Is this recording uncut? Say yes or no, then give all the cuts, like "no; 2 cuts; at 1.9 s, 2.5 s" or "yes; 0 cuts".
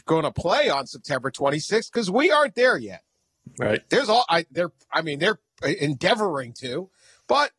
yes; 0 cuts